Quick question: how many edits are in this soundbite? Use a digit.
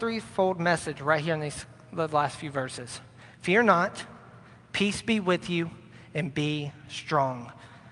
0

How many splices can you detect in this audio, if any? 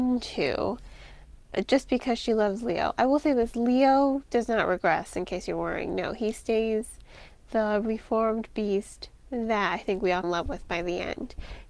1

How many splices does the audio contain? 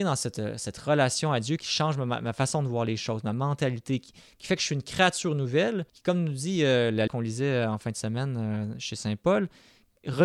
3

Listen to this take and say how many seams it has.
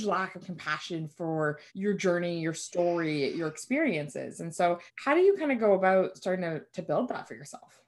2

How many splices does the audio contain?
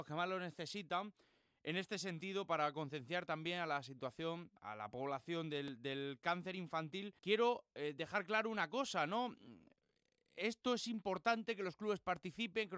2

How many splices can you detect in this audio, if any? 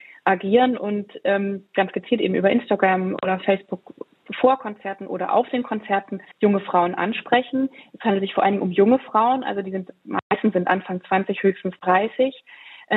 1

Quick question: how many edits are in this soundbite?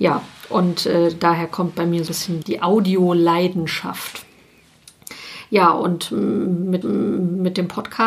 3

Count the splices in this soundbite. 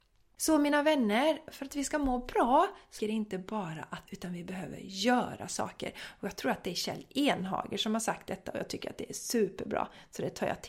2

